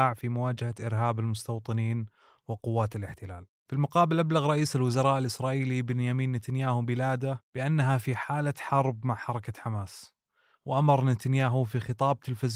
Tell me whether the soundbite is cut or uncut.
uncut